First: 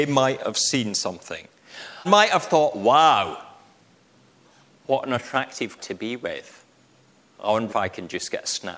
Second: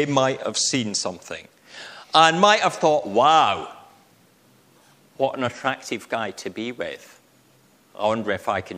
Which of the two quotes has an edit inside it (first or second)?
first